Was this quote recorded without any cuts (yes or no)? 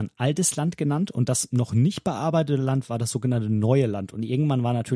yes